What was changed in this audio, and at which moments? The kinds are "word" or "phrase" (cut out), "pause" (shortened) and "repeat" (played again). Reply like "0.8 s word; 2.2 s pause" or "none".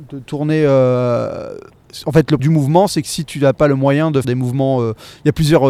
2.4 s word; 4.2 s word